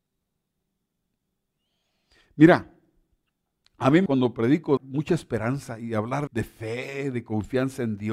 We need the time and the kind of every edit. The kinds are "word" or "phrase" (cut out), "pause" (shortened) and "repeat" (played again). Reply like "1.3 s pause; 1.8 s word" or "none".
4.1 s word; 4.8 s word; 6.3 s word